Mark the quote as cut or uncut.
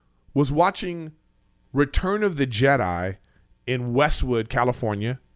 uncut